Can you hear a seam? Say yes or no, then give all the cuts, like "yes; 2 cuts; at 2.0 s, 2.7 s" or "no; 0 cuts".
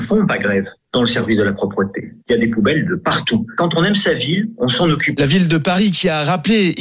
yes; 1 cut; at 2.2 s